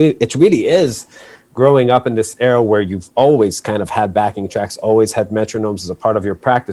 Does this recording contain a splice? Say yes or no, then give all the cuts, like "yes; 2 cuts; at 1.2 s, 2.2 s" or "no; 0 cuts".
no; 0 cuts